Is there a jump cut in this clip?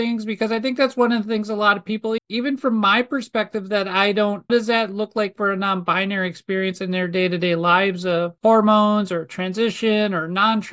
yes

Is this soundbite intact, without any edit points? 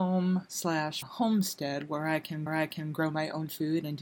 no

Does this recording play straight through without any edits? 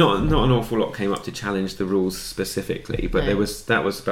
yes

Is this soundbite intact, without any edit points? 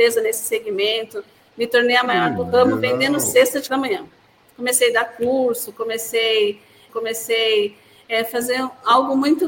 no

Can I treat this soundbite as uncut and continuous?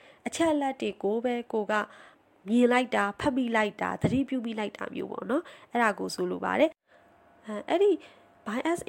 no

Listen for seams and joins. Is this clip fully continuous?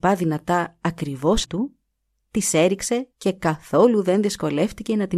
no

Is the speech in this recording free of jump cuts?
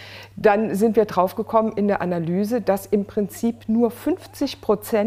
yes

